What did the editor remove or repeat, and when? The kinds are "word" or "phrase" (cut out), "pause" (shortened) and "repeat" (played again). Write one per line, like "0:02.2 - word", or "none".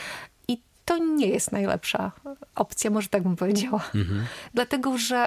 none